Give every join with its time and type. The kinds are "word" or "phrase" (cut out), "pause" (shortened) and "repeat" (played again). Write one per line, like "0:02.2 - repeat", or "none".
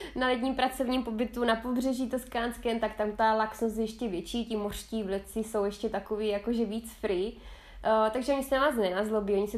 none